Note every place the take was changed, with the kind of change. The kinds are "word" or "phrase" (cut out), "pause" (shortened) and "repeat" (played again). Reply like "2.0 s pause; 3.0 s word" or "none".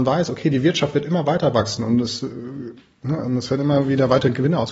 none